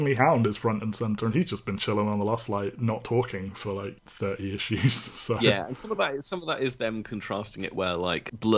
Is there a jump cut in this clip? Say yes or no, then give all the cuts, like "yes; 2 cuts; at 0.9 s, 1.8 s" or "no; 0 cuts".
no; 0 cuts